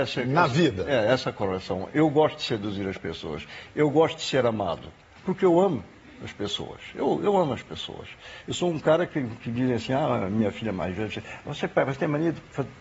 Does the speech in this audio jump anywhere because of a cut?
no; 0 cuts

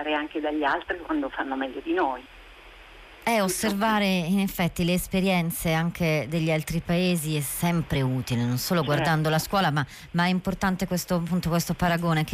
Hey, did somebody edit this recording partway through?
no; 0 cuts

